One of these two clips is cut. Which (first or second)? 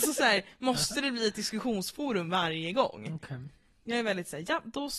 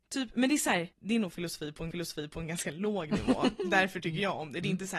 second